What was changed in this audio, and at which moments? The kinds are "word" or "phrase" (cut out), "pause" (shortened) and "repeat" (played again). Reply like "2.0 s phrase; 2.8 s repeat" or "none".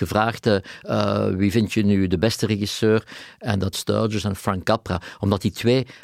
3.7 s phrase